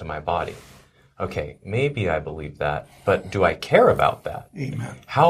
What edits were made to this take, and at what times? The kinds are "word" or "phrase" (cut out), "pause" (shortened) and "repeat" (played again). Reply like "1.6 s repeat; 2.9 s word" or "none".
none